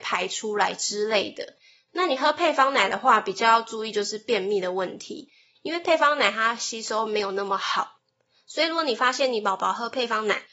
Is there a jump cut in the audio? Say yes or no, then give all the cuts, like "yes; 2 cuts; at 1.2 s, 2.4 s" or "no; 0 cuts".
no; 0 cuts